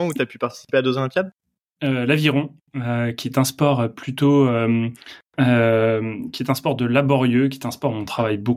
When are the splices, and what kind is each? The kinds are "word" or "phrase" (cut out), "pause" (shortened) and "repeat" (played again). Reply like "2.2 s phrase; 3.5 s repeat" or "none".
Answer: none